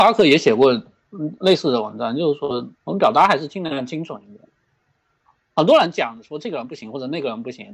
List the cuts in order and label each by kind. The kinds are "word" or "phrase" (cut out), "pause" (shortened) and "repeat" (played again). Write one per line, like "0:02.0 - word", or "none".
0:02.7 - pause